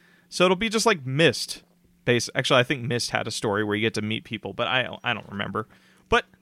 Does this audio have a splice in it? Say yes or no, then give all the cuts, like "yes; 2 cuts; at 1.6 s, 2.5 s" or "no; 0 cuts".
no; 0 cuts